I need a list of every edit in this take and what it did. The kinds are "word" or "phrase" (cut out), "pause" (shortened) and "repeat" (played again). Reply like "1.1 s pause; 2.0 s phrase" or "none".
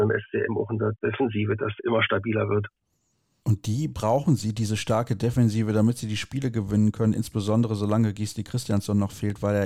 none